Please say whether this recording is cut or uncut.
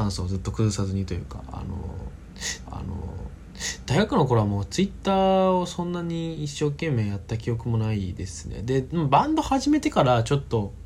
cut